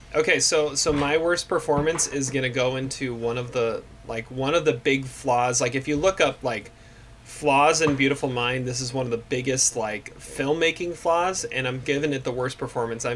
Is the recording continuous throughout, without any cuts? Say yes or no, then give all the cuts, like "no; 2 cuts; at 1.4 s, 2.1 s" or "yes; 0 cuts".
yes; 0 cuts